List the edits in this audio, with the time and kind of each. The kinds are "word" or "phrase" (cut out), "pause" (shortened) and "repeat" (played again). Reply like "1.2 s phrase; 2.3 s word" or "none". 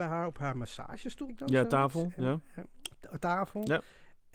1.3 s word